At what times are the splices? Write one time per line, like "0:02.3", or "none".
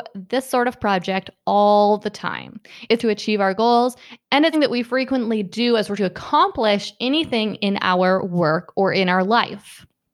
0:03.0
0:04.5
0:06.0

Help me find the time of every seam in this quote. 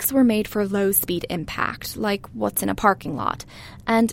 none

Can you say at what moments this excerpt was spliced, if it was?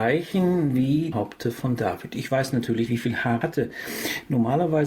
0:01.1
0:02.9
0:03.4

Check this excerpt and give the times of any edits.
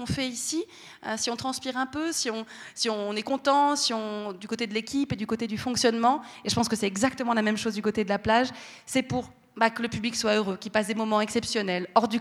none

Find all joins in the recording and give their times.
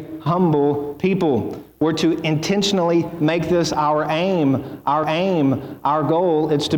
0:05.0

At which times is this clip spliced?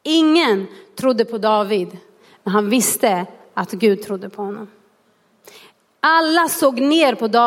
none

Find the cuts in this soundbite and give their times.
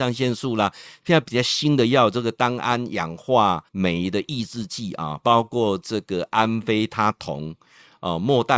0:03.7

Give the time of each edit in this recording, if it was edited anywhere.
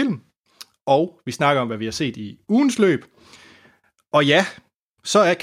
none

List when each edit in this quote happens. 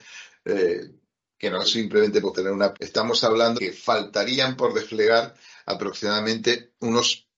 0:01.6
0:02.3
0:02.7
0:03.6

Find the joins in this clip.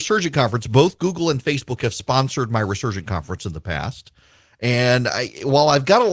none

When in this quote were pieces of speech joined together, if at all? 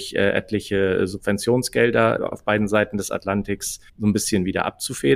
0:02.2
0:03.9

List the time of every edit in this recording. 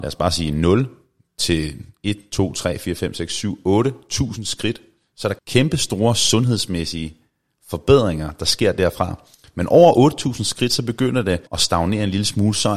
0:11.5

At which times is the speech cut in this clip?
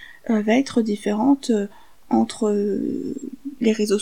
none

